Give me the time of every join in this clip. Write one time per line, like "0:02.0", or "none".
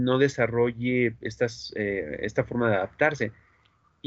none